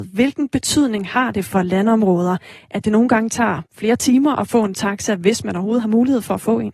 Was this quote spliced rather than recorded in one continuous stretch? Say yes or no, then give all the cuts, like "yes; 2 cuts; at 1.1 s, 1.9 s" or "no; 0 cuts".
yes; 1 cut; at 3.7 s